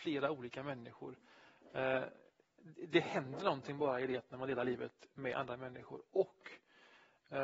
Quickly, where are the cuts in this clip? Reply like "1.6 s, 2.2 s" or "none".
none